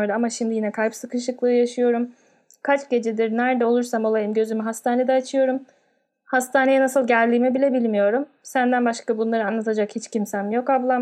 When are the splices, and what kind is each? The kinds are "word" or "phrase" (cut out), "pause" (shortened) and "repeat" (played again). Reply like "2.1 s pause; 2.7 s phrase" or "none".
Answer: none